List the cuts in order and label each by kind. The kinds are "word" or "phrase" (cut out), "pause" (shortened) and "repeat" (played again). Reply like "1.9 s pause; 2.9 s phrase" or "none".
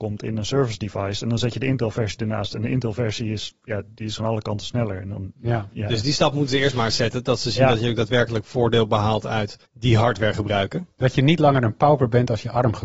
4.2 s phrase; 5.4 s pause; 9.6 s pause